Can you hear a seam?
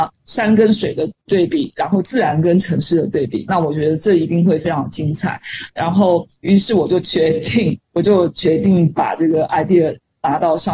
yes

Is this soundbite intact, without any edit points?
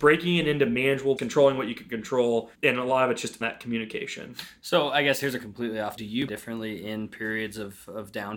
no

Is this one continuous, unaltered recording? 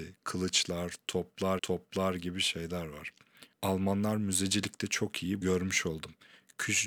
no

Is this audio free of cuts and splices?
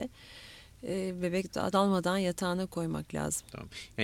no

